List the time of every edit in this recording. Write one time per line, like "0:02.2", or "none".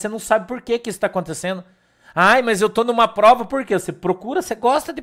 none